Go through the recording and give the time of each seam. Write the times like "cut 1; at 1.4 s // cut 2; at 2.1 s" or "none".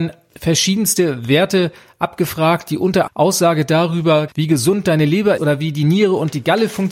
cut 1; at 3.1 s // cut 2; at 4.3 s // cut 3; at 5.4 s

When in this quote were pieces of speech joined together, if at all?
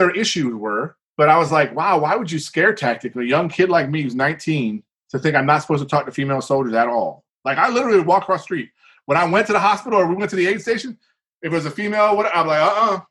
none

